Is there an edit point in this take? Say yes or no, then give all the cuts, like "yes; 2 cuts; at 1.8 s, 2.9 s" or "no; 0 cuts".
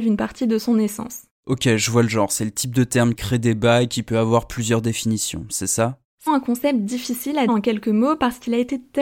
yes; 3 cuts; at 3.2 s, 6.3 s, 7.5 s